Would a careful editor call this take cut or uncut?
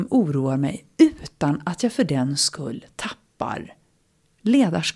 uncut